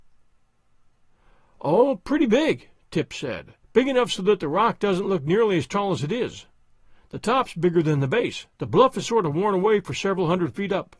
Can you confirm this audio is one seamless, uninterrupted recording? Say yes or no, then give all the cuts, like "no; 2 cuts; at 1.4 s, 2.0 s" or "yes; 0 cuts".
no; 2 cuts; at 3.6 s, 8.5 s